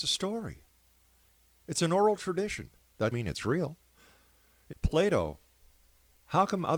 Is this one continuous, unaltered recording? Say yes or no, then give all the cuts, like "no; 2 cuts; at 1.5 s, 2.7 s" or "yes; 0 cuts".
no; 2 cuts; at 3.1 s, 4.7 s